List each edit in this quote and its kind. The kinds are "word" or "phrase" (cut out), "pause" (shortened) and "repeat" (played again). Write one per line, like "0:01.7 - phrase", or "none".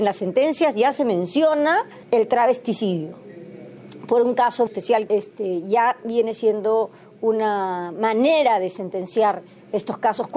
0:02.0 - pause
0:04.7 - word
0:05.1 - phrase